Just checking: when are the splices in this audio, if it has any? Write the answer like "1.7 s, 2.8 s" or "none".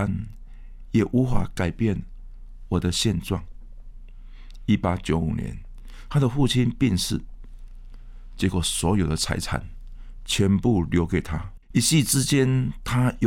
11.6 s